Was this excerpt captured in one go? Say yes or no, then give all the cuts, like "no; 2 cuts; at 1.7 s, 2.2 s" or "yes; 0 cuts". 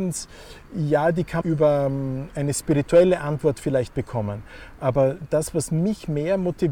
no; 1 cut; at 1.4 s